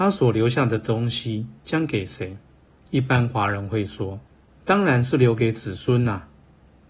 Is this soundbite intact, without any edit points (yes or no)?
no